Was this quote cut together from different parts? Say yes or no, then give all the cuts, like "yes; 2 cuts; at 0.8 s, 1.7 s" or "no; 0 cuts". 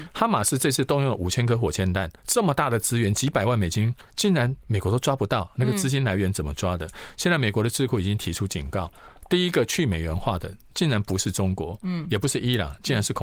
yes; 2 cuts; at 2.2 s, 4.1 s